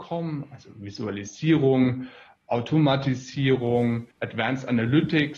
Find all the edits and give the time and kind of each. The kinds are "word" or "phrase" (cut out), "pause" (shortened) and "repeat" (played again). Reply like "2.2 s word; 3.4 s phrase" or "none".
2.4 s word; 4.1 s pause